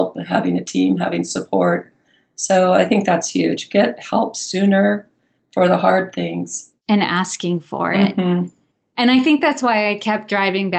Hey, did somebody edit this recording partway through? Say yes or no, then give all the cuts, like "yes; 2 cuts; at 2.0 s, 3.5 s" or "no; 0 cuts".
no; 0 cuts